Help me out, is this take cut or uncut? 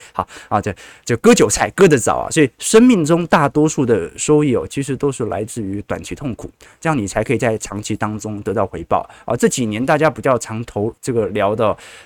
cut